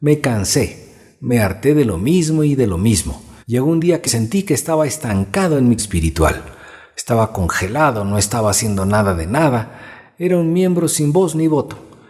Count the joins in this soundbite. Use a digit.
3